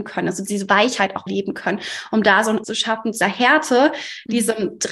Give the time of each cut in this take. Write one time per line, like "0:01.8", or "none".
0:01.3
0:02.6
0:03.2